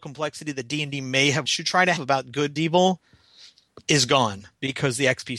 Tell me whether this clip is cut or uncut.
cut